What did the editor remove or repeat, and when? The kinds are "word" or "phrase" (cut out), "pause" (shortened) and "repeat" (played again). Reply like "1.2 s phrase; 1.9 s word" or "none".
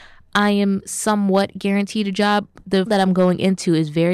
2.9 s word